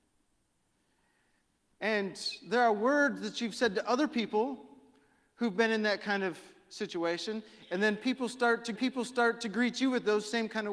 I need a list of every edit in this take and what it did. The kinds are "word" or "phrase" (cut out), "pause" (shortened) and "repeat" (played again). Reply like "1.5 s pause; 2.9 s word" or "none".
8.7 s repeat